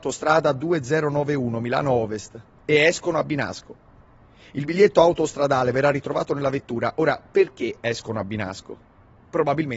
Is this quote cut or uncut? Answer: uncut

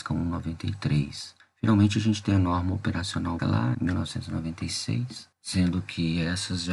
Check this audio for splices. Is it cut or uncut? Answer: cut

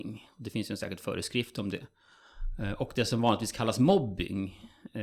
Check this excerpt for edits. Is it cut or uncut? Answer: uncut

